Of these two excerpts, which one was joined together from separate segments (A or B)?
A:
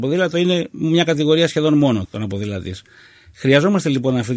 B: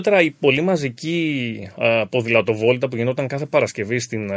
A